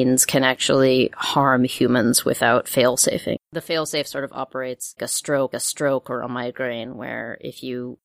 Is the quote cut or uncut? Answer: cut